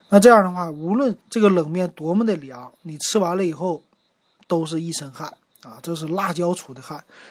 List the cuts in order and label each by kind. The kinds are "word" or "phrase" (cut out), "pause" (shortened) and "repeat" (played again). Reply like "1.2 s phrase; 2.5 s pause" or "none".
1.2 s pause